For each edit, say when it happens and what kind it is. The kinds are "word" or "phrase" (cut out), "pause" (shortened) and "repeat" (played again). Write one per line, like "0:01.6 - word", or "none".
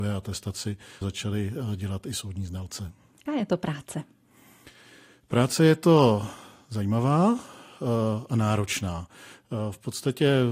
0:01.0 - word
0:03.3 - word

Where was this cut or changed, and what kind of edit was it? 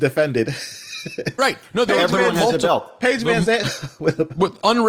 0:01.4 - word
0:03.6 - word

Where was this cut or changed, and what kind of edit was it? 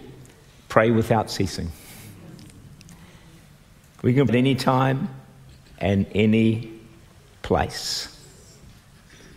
0:04.3 - word

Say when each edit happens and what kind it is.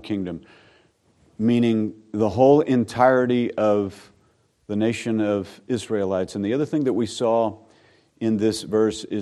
none

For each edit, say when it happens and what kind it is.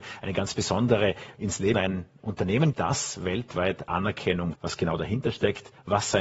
0:01.3 - word
0:01.7 - word
0:02.7 - word
0:04.5 - word

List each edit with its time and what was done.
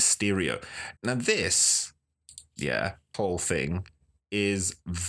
0:01.0 - pause
0:03.1 - word

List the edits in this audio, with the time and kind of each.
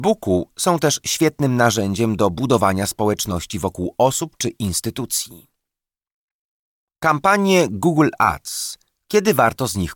none

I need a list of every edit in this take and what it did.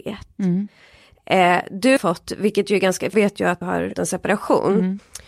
0:02.0 - word
0:03.1 - word
0:03.6 - word
0:03.9 - word

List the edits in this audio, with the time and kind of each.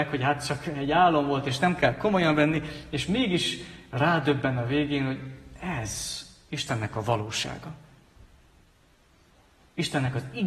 none

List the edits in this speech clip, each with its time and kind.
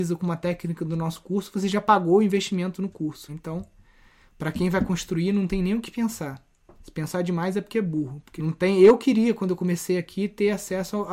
0:03.3 - word
0:08.4 - word

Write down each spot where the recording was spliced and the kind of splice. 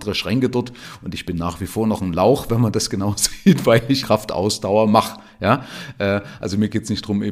0:04.0 - word

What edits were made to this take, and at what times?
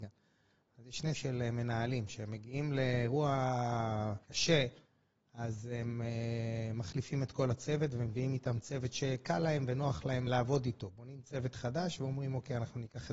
0:01.1 - word
0:04.2 - pause
0:10.3 - word

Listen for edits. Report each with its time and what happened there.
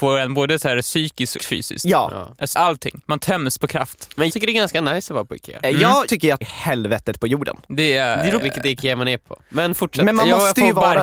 0:01.4 - word
0:02.5 - word
0:04.3 - word
0:06.1 - word
0:06.4 - word
0:08.4 - word

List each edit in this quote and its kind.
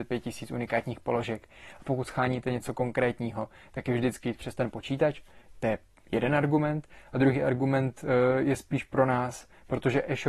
0:04.2 - word

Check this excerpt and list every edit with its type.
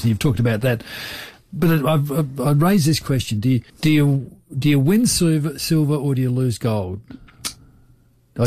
0:03.7 - pause

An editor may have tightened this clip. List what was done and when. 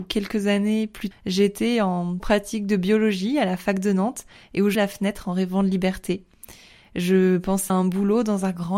0:01.1 - word
0:02.2 - word
0:04.7 - word
0:07.7 - word

